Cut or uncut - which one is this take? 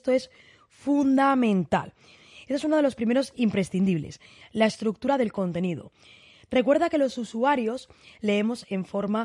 uncut